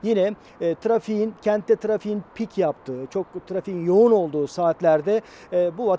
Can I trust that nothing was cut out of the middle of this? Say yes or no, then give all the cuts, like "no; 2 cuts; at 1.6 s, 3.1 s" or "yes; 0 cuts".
yes; 0 cuts